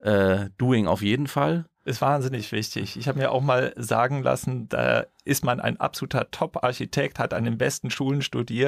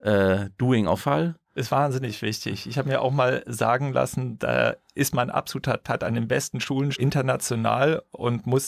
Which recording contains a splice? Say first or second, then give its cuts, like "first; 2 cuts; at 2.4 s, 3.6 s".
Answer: second; 4 cuts; at 1.0 s, 5.3 s, 5.8 s, 6.9 s